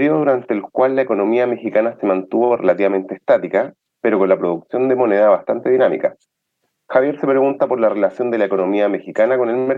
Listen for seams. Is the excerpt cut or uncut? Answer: uncut